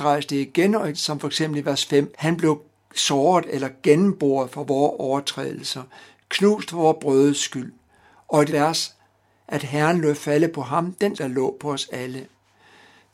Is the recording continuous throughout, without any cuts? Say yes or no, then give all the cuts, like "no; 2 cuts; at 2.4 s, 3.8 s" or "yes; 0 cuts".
no; 4 cuts; at 0.9 s, 2.1 s, 8.5 s, 11.1 s